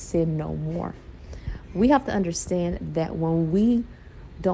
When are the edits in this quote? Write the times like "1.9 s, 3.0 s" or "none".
none